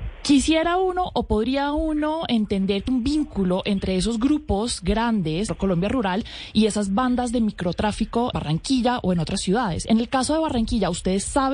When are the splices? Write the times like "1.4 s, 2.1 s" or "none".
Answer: 2.9 s, 5.5 s, 8.3 s